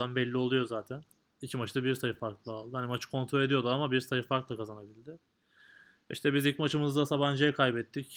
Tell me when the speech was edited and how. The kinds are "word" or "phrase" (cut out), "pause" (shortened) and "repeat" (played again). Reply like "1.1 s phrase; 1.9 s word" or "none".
none